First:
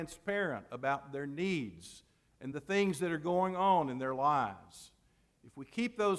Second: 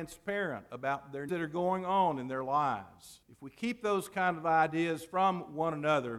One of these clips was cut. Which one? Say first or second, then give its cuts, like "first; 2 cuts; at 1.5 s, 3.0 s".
second; 2 cuts; at 1.3 s, 3.2 s